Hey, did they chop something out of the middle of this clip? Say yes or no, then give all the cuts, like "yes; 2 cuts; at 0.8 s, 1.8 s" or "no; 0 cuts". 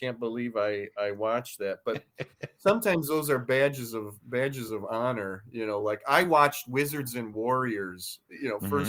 no; 0 cuts